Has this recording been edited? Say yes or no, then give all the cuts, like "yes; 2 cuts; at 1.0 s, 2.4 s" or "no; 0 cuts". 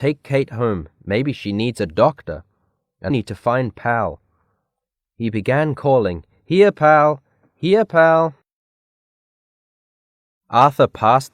yes; 1 cut; at 3.1 s